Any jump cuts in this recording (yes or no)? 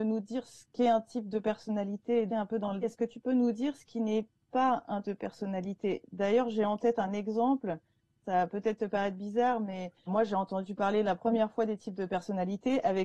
yes